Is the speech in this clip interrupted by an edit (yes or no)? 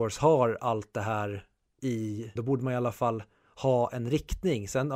yes